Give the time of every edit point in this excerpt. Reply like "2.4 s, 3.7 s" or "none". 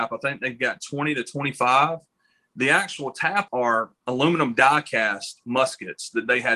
3.5 s, 4.0 s